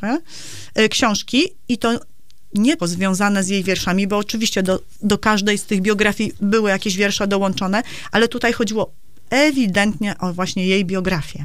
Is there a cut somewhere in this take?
yes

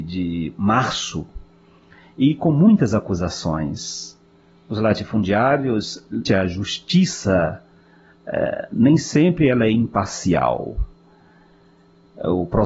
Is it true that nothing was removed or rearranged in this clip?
no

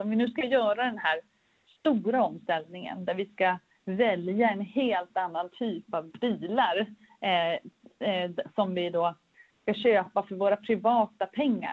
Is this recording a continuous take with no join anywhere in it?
yes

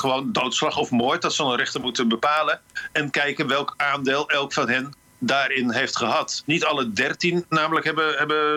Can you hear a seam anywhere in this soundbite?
no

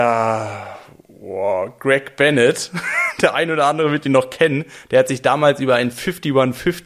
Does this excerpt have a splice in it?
no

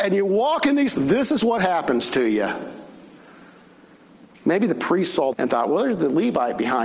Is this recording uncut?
no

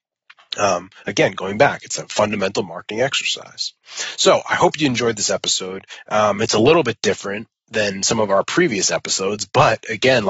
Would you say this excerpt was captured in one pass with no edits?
yes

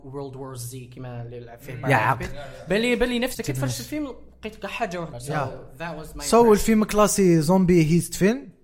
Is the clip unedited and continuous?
no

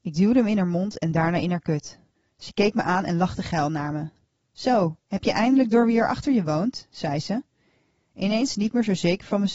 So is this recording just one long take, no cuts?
no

